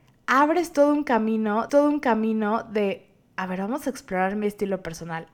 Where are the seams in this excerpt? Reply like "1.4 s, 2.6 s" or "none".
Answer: 1.7 s